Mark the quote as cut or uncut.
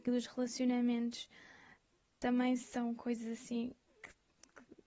uncut